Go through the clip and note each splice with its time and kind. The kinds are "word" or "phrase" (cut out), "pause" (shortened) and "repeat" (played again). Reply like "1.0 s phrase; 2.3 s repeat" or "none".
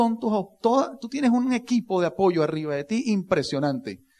none